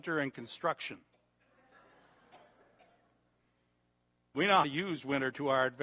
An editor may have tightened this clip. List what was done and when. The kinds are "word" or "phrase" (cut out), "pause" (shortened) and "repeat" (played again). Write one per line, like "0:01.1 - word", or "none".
0:04.6 - word